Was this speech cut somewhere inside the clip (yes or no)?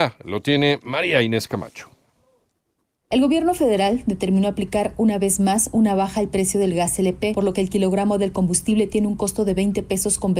no